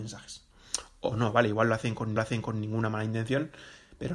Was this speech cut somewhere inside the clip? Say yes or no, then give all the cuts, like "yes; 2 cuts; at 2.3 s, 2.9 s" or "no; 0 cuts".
yes; 1 cut; at 2.2 s